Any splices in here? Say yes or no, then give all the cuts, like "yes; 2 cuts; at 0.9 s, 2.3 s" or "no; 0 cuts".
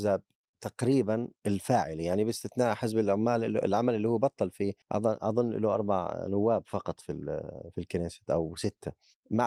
yes; 2 cuts; at 1.4 s, 4.8 s